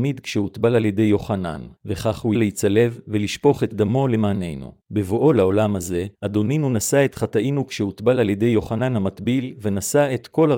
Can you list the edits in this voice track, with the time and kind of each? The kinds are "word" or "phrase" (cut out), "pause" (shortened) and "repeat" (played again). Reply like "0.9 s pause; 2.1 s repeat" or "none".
1.8 s pause; 2.3 s word; 4.8 s pause; 6.1 s pause

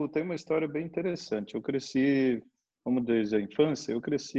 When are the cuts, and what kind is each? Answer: none

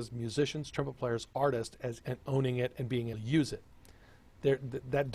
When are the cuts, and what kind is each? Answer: 2.0 s phrase; 3.1 s word

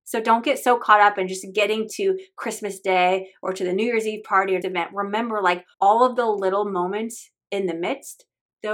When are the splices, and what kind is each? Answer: 4.6 s phrase; 5.7 s pause

